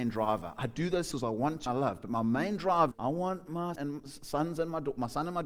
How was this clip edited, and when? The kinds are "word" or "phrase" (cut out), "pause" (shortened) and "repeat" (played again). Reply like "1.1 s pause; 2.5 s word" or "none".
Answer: 1.1 s word; 1.7 s word; 2.9 s word; 3.8 s word